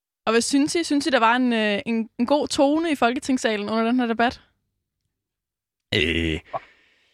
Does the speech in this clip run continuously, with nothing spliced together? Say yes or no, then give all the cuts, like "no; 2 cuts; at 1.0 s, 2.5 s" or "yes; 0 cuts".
yes; 0 cuts